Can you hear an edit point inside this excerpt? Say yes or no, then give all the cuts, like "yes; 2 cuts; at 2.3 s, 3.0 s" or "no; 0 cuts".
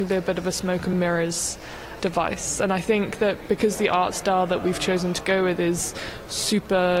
no; 0 cuts